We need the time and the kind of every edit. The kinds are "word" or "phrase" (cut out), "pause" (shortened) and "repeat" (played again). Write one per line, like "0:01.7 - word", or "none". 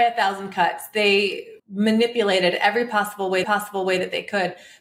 0:01.6 - pause
0:03.4 - repeat